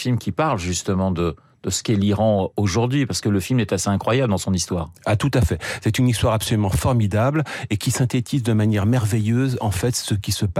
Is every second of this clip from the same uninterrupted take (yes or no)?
yes